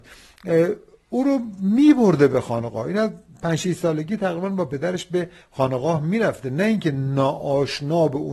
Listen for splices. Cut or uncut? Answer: uncut